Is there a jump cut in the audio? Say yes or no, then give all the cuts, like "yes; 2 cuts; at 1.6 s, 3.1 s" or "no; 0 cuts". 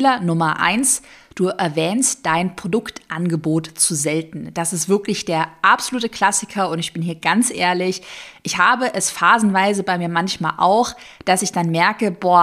no; 0 cuts